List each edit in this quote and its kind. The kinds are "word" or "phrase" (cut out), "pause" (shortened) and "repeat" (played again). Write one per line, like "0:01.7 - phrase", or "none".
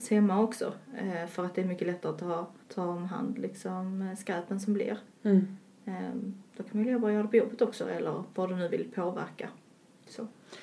0:02.6 - pause